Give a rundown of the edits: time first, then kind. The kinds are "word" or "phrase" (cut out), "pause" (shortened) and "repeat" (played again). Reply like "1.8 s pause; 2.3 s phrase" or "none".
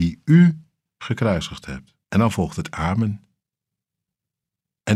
2.0 s pause